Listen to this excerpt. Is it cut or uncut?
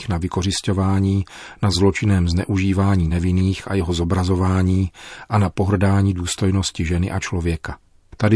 uncut